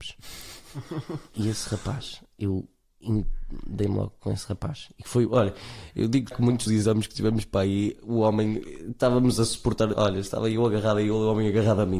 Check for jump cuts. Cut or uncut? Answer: cut